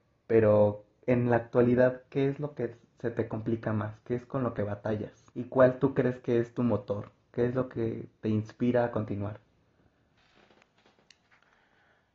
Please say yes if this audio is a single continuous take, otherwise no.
no